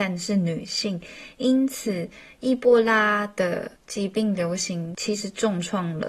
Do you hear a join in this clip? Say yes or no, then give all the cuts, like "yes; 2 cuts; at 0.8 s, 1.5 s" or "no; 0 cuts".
yes; 1 cut; at 3.8 s